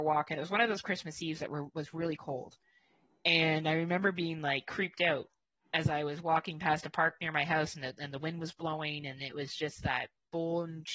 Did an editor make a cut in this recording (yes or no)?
no